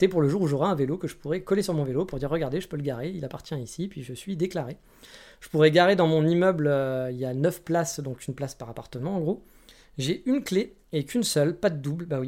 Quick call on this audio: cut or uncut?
uncut